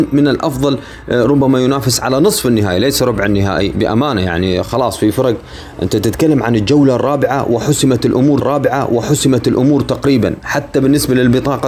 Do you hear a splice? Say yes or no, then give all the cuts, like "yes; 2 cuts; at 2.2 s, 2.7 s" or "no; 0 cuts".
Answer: yes; 2 cuts; at 3.7 s, 8.4 s